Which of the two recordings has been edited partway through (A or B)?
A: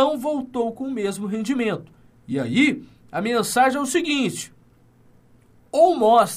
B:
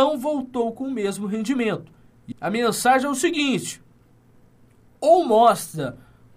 B